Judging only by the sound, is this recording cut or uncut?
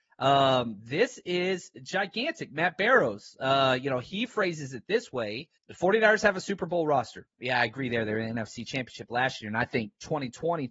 cut